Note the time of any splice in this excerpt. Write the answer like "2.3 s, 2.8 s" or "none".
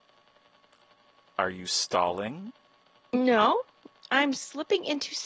2.8 s